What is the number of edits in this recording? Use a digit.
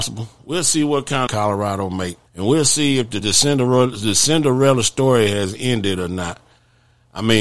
3